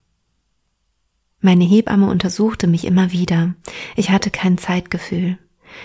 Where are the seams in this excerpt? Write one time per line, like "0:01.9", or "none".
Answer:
none